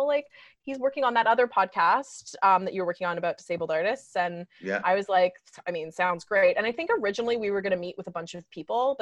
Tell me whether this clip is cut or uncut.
uncut